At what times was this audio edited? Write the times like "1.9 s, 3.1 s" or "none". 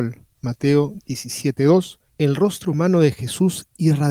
2.1 s